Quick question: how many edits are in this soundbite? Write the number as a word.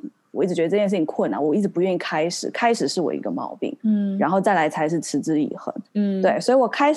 two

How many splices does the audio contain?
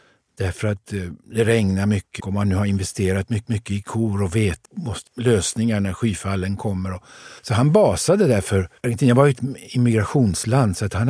six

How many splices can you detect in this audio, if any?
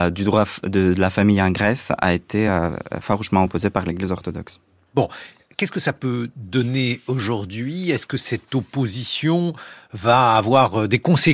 zero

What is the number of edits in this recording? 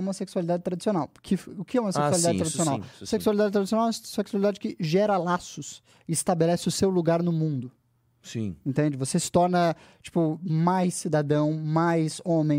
zero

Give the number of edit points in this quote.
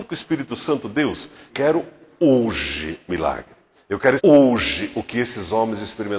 three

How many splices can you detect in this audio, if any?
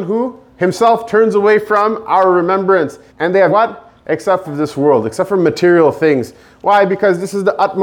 three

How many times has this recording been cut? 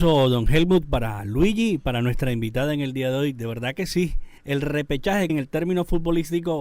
two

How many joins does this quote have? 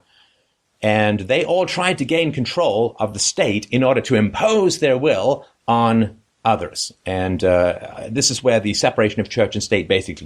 zero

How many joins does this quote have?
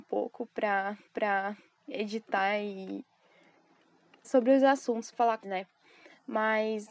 four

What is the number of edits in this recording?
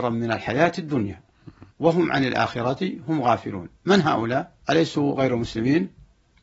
three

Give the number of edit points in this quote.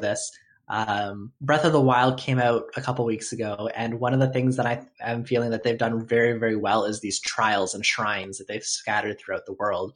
one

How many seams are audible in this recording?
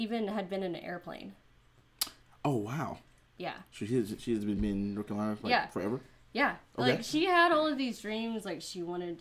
zero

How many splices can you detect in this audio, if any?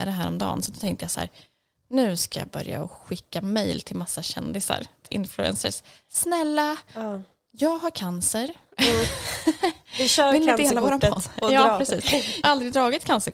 two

